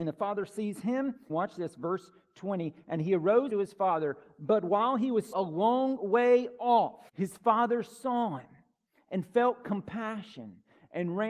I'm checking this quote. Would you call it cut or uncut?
cut